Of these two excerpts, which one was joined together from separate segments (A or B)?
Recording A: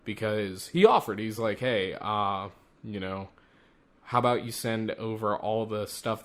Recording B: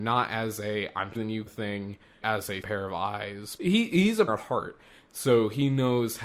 B